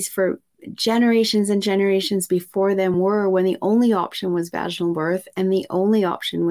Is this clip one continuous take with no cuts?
yes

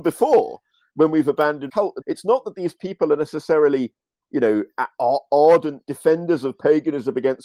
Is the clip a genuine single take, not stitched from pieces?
no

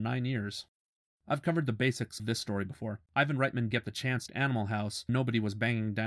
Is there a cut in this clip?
yes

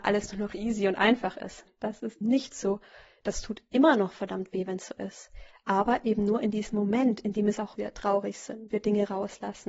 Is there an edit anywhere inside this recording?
yes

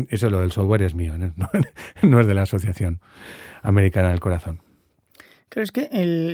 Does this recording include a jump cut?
no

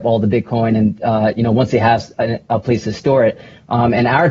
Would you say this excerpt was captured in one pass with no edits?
yes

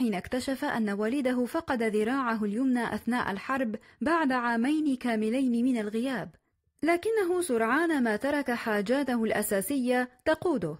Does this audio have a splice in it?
no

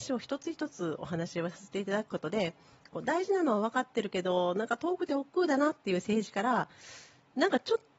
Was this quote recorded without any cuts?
yes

